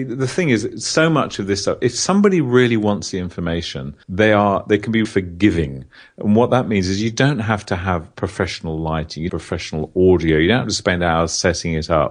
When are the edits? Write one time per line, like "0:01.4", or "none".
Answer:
0:04.0
0:05.0
0:09.3